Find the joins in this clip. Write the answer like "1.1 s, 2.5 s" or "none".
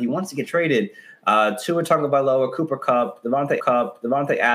3.6 s

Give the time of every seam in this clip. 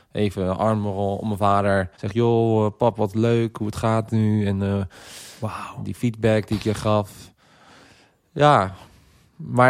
1.9 s

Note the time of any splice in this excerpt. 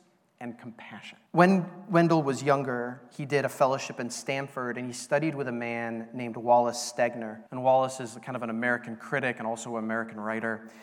1.3 s, 7.5 s

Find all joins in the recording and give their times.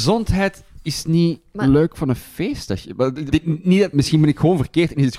3.3 s, 3.9 s

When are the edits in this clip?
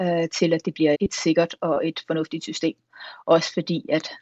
0.9 s

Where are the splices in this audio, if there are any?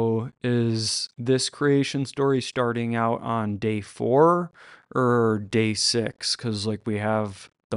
1.1 s

